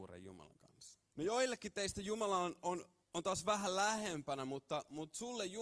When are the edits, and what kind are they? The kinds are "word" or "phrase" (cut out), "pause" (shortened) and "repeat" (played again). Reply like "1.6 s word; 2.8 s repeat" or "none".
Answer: 1.1 s pause; 3.0 s pause